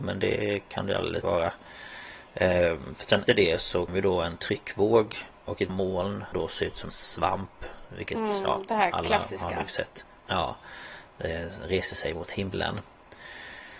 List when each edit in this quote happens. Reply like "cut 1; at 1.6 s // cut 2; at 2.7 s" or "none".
cut 1; at 1.2 s // cut 2; at 3.3 s // cut 3; at 3.9 s // cut 4; at 5.7 s // cut 5; at 6.3 s // cut 6; at 6.9 s